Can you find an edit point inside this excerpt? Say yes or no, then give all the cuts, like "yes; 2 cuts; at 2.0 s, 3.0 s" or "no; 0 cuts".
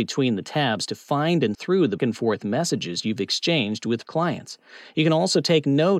yes; 3 cuts; at 1.5 s, 2.0 s, 4.0 s